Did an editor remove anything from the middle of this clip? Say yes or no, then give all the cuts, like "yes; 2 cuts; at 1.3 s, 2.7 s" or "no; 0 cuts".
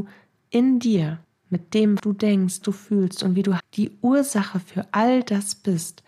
yes; 4 cuts; at 1.2 s, 2.0 s, 2.6 s, 3.6 s